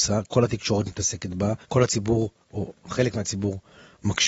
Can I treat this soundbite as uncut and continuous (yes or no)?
no